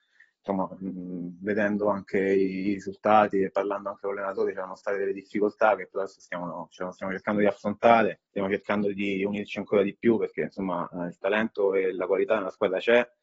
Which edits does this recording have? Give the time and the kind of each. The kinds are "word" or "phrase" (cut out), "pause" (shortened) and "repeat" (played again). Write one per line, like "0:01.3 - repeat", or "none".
0:08.3 - pause